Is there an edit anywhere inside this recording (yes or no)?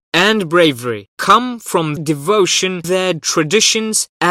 yes